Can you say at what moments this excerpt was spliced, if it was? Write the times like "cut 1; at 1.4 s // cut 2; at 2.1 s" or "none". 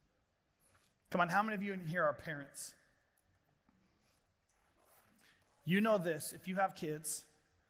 none